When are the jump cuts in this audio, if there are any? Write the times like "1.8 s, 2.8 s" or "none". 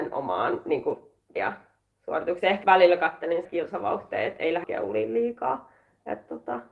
1.4 s, 2.6 s, 3.4 s, 4.6 s